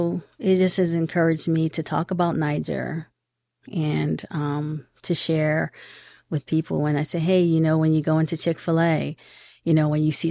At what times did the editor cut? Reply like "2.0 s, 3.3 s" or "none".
none